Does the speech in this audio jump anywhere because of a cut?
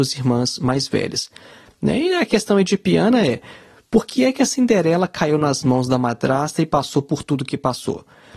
no; 0 cuts

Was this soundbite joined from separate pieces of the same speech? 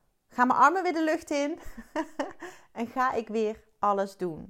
no; 0 cuts

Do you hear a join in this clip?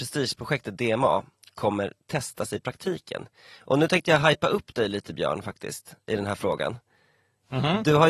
no; 0 cuts

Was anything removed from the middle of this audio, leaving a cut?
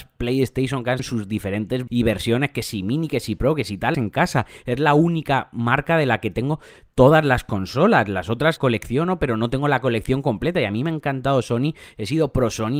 yes; 4 cuts; at 1.0 s, 1.9 s, 3.9 s, 8.6 s

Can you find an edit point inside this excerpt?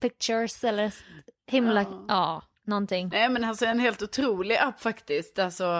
no; 0 cuts

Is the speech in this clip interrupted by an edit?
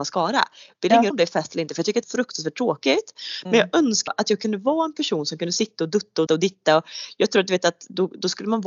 yes; 4 cuts; at 1.1 s, 2.0 s, 4.1 s, 6.3 s

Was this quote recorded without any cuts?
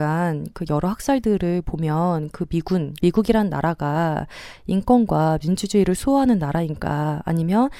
no; 2 cuts; at 2.3 s, 3.0 s

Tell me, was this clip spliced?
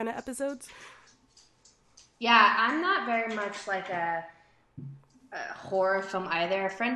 no; 0 cuts

